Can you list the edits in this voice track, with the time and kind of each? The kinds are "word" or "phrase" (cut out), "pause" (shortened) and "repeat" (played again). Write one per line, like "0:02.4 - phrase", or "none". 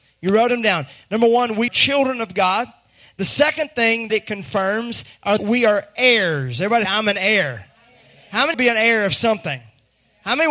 0:01.7 - word
0:04.1 - word
0:05.4 - word
0:06.8 - word
0:08.5 - word